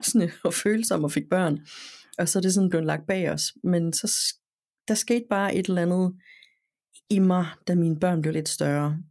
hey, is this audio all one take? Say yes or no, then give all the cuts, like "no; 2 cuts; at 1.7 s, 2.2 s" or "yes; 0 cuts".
yes; 0 cuts